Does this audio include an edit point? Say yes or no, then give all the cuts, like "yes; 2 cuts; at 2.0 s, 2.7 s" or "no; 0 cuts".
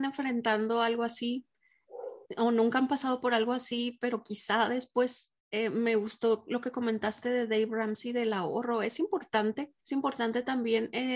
yes; 3 cuts; at 2.2 s, 5.4 s, 9.8 s